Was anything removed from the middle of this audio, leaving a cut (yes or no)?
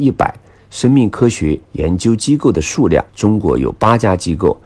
yes